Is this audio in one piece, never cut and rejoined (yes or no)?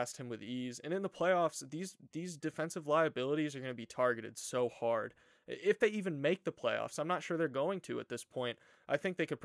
yes